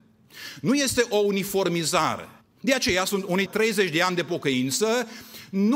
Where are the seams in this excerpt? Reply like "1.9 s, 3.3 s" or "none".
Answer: 2.4 s, 3.5 s